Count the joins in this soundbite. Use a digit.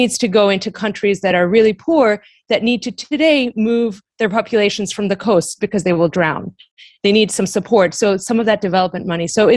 0